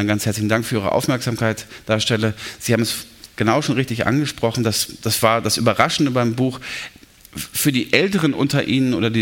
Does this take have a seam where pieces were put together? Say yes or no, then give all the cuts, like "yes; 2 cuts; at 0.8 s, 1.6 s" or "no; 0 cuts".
no; 0 cuts